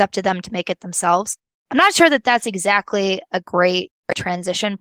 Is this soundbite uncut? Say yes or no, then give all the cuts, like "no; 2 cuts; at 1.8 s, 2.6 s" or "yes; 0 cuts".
yes; 0 cuts